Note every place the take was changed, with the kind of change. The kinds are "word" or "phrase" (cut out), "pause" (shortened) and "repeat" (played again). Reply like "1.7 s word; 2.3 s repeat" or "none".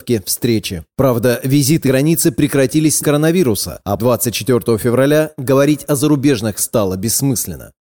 1.9 s word; 3.0 s phrase; 4.0 s word; 6.6 s word